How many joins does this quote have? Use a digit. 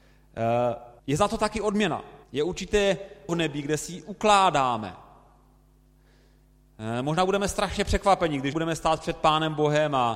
4